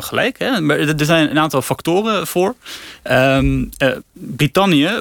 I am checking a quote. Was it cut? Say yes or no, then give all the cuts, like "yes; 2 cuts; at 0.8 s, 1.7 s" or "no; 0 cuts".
no; 0 cuts